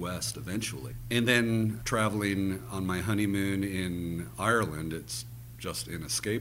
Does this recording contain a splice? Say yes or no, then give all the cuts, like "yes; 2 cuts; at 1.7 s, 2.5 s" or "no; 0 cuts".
no; 0 cuts